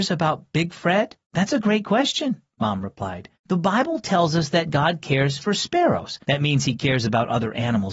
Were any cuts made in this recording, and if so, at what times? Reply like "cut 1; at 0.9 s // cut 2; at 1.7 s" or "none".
cut 1; at 1.2 s // cut 2; at 3.3 s // cut 3; at 6.2 s